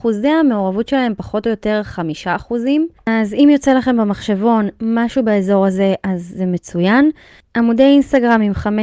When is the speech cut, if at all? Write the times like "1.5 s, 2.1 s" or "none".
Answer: 3.0 s